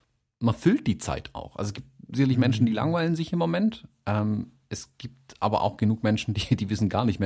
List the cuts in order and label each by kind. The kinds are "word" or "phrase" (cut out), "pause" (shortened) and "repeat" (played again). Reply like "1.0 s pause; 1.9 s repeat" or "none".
none